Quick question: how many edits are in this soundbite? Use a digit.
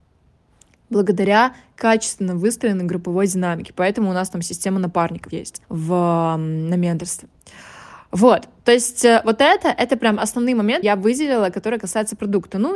3